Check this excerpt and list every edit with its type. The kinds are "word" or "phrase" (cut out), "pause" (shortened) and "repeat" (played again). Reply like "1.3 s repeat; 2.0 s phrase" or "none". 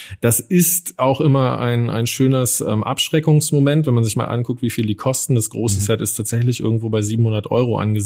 none